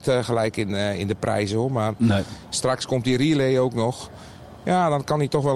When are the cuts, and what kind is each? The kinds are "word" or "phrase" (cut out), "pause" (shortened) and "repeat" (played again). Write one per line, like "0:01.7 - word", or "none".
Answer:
none